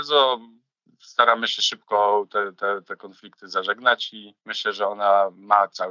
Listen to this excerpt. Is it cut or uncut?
cut